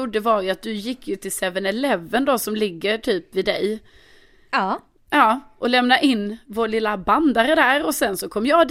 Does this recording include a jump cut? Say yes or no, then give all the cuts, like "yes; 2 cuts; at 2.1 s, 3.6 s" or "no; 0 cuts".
no; 0 cuts